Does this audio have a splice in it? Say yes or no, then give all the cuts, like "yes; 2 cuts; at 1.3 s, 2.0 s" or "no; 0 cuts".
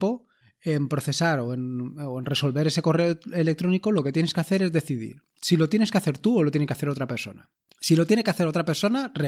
no; 0 cuts